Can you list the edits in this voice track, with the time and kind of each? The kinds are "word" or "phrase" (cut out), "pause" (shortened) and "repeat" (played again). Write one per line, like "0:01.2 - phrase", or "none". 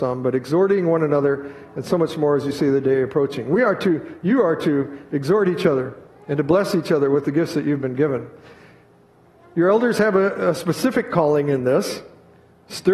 none